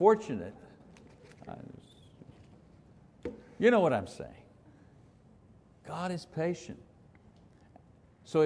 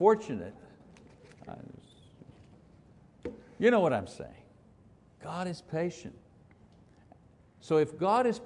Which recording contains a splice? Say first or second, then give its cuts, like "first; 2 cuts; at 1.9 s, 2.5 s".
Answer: second; 1 cut; at 4.6 s